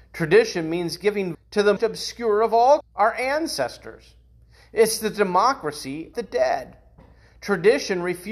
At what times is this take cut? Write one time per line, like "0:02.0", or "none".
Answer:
0:01.3
0:01.8
0:02.8
0:06.1